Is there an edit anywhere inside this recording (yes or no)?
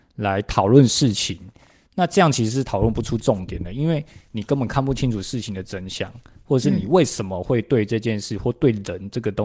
no